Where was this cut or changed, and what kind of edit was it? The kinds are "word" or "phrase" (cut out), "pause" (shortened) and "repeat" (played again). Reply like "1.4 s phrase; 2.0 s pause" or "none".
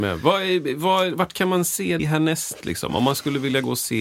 2.0 s word